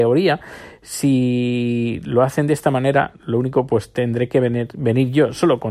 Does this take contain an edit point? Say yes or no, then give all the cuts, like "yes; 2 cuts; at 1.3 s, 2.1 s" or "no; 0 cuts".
no; 0 cuts